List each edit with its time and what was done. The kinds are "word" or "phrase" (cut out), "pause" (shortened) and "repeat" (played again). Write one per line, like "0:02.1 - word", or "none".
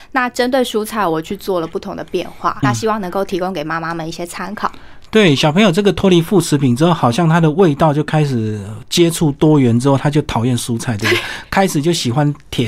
0:02.6 - word